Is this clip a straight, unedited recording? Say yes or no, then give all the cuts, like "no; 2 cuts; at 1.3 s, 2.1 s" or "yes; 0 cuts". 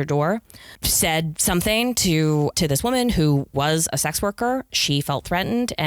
yes; 0 cuts